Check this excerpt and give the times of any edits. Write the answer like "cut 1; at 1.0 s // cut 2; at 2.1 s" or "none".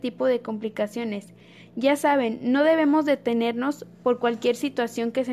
none